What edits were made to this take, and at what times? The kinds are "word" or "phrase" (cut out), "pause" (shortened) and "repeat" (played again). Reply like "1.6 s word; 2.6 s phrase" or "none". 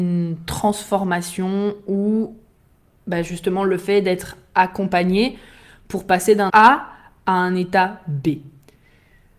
6.5 s word